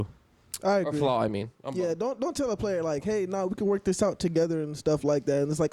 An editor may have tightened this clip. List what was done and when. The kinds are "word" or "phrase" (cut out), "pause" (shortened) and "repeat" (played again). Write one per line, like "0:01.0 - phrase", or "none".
none